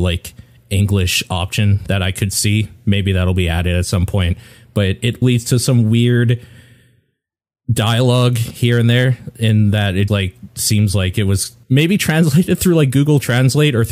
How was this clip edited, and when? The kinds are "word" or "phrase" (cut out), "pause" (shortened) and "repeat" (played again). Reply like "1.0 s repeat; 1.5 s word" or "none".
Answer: 5.2 s word; 10.1 s word; 11.6 s pause